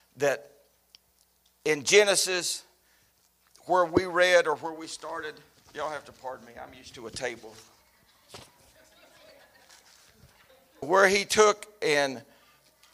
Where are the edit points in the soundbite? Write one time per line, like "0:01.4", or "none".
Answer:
0:05.5
0:10.8